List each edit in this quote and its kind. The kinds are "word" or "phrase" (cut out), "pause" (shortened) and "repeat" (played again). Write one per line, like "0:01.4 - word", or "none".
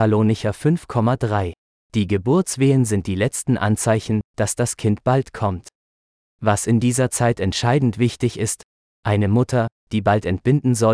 none